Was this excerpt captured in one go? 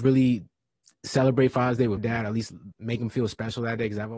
no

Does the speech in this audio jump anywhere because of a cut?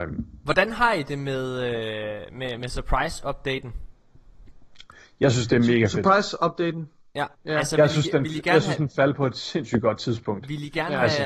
yes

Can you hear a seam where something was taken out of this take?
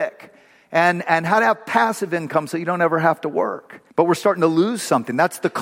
yes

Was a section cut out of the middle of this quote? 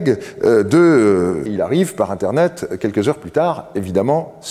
yes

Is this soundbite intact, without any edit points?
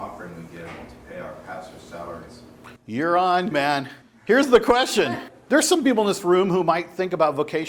no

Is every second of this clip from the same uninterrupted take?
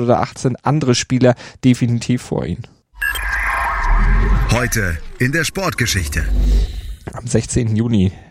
yes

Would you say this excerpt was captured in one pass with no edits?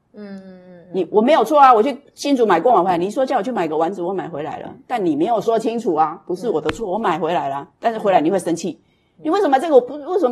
yes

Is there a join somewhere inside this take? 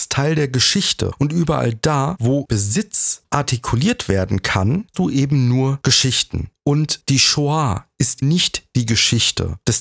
yes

